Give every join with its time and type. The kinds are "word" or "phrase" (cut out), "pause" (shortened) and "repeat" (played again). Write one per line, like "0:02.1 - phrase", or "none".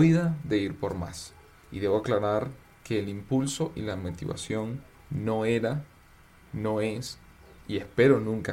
none